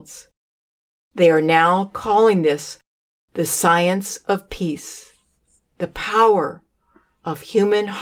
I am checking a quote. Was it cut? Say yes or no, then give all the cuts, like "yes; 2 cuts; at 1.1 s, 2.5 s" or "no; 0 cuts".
no; 0 cuts